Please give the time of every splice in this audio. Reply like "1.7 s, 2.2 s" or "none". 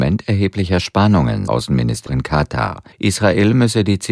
1.5 s, 2.1 s, 2.9 s